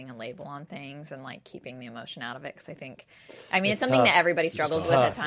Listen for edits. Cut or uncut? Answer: uncut